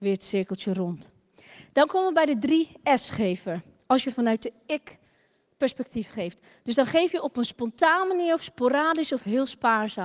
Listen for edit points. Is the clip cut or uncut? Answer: uncut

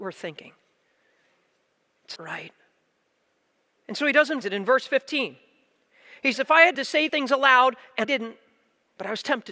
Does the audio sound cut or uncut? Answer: cut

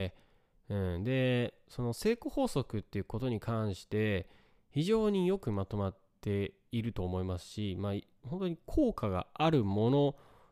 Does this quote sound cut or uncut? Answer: uncut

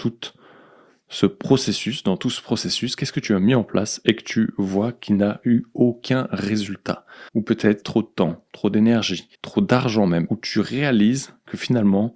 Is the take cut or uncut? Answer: cut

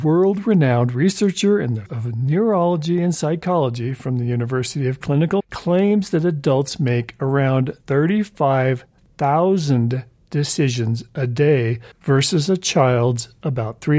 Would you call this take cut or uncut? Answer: cut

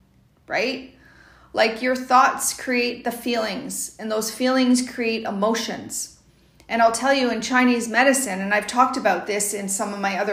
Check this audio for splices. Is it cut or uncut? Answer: uncut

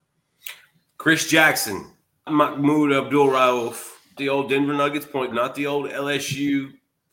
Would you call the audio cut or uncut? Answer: cut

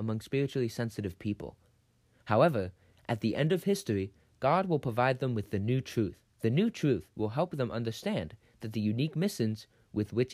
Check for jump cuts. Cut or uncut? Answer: cut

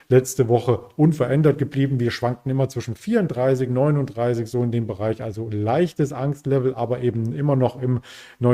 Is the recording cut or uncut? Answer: uncut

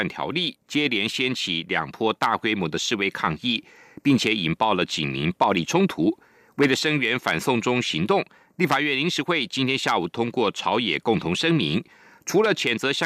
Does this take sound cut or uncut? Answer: uncut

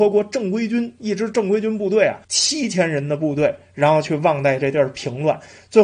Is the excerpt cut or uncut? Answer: cut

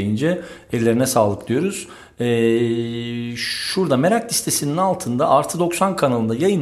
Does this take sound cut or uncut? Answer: uncut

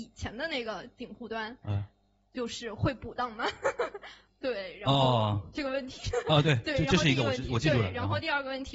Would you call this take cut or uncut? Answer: uncut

